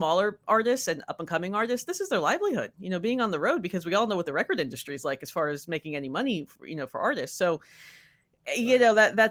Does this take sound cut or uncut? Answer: uncut